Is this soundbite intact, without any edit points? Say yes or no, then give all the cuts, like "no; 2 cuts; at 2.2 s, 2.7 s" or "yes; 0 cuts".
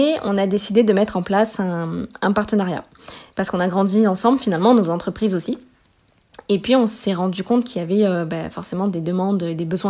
yes; 0 cuts